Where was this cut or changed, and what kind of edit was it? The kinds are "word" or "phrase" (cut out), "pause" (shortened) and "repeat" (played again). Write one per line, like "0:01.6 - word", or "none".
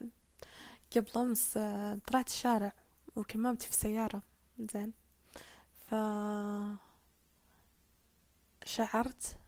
none

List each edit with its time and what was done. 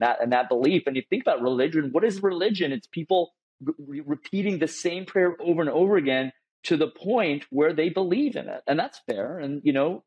none

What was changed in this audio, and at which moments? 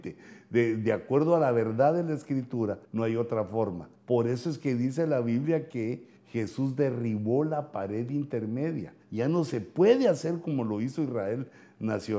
0:02.8 - pause
0:03.9 - pause
0:06.2 - pause
0:09.0 - pause

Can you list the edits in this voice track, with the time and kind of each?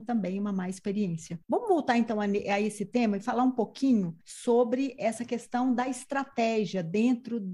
0:01.4 - pause
0:04.2 - pause

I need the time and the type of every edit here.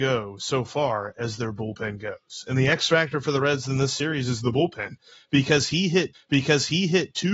0:06.1 - repeat

